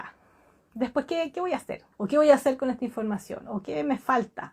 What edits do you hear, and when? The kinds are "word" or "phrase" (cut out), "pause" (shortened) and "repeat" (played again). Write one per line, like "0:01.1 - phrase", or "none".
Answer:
0:01.9 - pause